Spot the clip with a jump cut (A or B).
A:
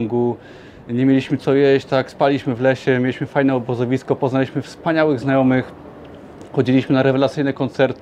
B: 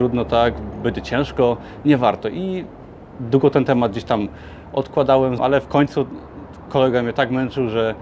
B